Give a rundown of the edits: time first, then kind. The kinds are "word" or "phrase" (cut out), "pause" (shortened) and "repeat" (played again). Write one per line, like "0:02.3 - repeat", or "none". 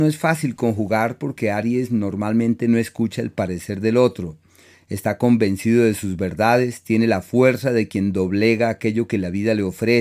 none